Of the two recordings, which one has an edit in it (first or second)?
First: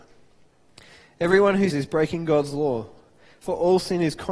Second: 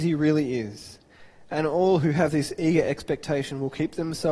first